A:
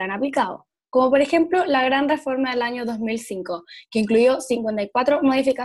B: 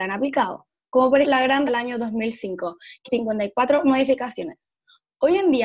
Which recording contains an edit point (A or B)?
B